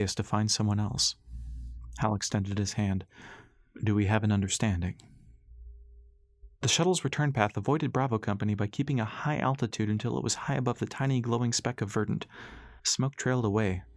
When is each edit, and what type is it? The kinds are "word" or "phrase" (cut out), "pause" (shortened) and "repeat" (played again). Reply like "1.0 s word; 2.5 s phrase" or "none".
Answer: 12.8 s pause